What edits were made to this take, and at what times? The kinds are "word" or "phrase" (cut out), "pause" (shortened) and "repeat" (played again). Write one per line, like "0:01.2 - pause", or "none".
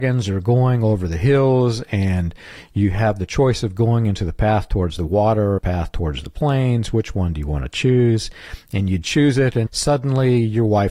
0:05.6 - phrase
0:09.7 - word